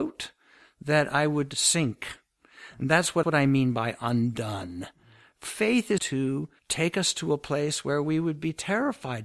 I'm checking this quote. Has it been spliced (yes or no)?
yes